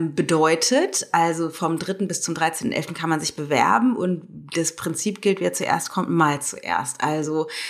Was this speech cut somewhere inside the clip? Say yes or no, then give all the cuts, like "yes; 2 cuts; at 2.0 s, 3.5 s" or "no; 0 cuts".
no; 0 cuts